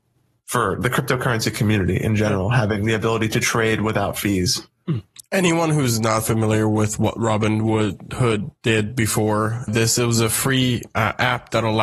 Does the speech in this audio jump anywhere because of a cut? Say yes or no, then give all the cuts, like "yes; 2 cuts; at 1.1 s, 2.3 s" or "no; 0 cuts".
yes; 1 cut; at 9.7 s